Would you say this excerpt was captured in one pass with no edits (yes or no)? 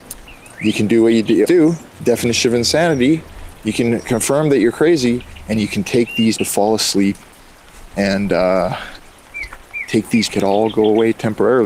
no